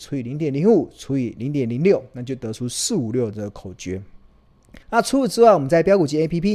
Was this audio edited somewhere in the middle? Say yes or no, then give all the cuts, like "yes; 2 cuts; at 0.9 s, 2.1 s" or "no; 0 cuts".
yes; 1 cut; at 4.8 s